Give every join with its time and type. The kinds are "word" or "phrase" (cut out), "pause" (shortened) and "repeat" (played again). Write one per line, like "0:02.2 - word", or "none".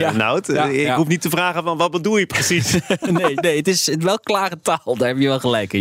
none